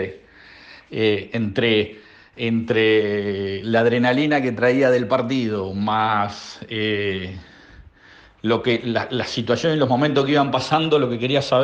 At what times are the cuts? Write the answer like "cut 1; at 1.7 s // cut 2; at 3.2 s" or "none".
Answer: none